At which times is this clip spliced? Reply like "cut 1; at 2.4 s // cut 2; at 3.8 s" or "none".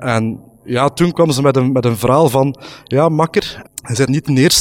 cut 1; at 3.7 s